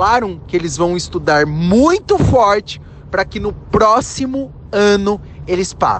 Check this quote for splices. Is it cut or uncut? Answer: uncut